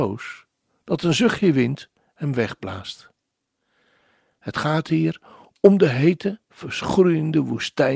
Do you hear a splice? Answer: no; 0 cuts

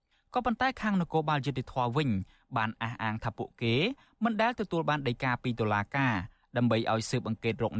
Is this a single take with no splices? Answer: yes; 0 cuts

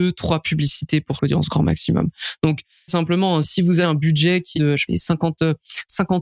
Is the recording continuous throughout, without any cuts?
no; 5 cuts; at 1.2 s, 2.9 s, 3.8 s, 4.5 s, 4.9 s

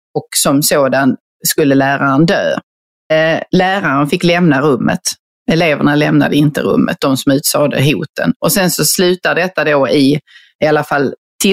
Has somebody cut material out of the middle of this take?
yes; 1 cut; at 3.5 s

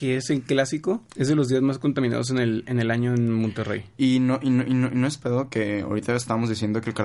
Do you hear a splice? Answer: yes; 1 cut; at 1.1 s

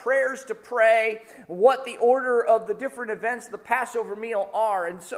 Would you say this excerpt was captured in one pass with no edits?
yes; 0 cuts

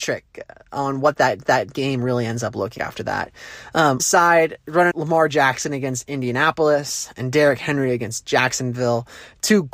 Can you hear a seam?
yes; 4 cuts; at 1.4 s, 2.8 s, 4.0 s, 4.9 s

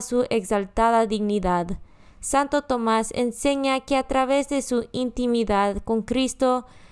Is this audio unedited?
yes; 0 cuts

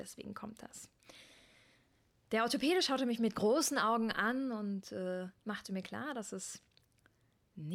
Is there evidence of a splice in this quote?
no; 0 cuts

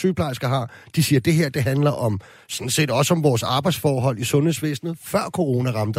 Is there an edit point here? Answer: no; 0 cuts

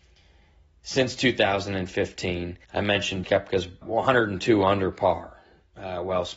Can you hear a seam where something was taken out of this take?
yes; 3 cuts; at 2.6 s, 3.2 s, 3.8 s

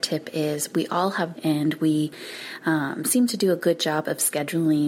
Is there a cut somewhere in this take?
yes; 1 cut; at 1.3 s

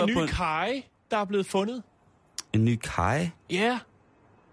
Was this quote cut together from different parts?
yes; 1 cut; at 2.5 s

